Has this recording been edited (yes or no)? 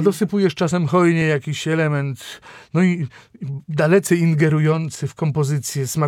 no